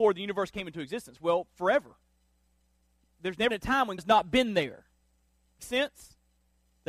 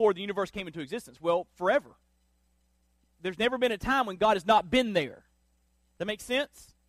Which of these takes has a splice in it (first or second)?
first